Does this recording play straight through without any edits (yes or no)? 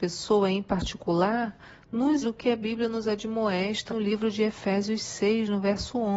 no